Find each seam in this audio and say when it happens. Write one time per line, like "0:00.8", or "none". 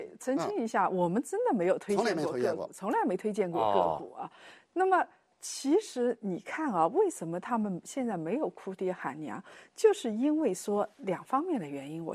none